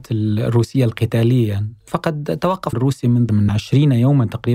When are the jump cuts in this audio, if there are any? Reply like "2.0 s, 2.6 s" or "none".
2.7 s, 3.3 s